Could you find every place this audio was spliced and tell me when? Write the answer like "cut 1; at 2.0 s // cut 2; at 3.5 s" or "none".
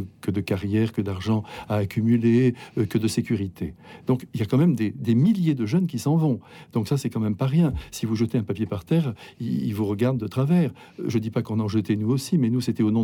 none